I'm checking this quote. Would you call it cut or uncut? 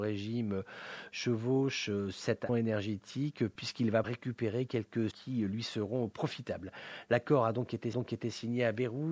cut